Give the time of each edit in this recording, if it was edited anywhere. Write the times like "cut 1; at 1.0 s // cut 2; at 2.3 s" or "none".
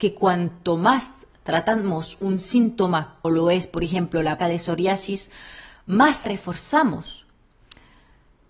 cut 1; at 3.2 s // cut 2; at 4.4 s // cut 3; at 6.2 s